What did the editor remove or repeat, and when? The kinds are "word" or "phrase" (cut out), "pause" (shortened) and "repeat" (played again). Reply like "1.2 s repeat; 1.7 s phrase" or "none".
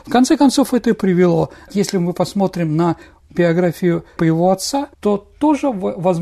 4.2 s word; 4.9 s pause